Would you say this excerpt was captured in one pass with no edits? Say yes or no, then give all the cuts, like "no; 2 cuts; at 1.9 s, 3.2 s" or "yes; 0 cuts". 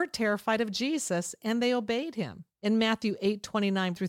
no; 1 cut; at 2.5 s